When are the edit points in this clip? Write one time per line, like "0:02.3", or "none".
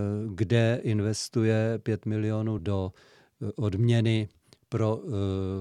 0:02.6